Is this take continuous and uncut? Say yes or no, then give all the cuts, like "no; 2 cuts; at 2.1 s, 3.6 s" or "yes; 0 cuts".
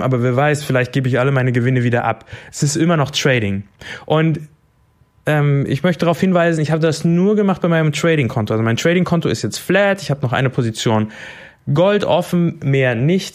yes; 0 cuts